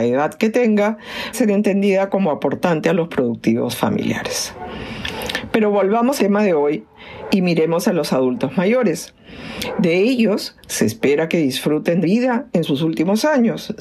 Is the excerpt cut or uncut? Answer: cut